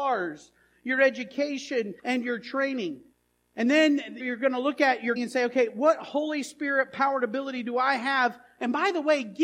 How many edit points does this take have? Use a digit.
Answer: 4